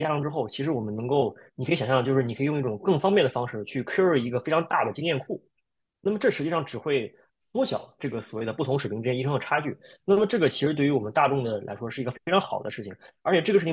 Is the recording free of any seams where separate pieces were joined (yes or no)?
yes